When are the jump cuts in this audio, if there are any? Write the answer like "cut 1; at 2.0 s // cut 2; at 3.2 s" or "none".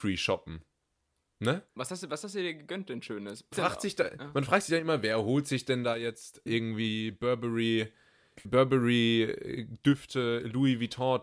cut 1; at 1.7 s // cut 2; at 3.5 s // cut 3; at 6.5 s // cut 4; at 8.4 s